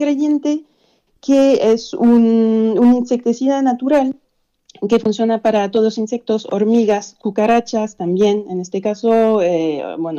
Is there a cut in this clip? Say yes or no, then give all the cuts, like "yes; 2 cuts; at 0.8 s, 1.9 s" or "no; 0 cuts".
no; 0 cuts